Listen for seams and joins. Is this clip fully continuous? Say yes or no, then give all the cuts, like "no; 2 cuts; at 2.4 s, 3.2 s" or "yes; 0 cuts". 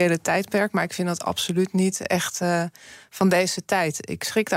yes; 0 cuts